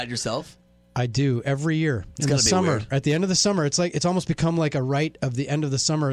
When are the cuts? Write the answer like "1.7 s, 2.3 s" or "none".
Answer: none